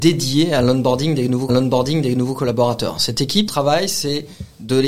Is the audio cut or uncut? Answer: cut